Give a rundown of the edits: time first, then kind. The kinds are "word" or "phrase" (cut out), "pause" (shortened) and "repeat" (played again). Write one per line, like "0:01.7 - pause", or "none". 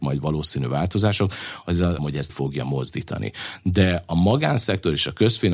0:02.0 - word
0:02.3 - word